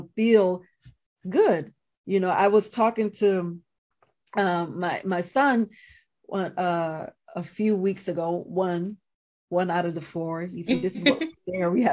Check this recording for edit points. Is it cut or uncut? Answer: uncut